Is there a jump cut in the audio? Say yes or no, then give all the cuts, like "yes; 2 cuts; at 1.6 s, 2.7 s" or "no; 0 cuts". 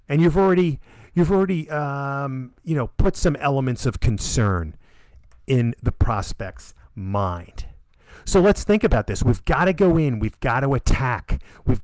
no; 0 cuts